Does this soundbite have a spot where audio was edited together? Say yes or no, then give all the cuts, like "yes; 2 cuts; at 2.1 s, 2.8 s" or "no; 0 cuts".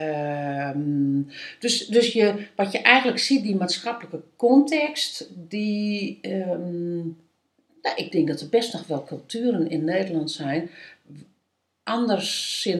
no; 0 cuts